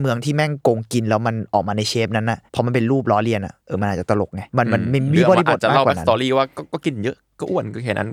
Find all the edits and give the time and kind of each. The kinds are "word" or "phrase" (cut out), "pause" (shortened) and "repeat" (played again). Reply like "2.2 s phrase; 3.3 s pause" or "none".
2.5 s pause; 3.6 s pause; 4.5 s pause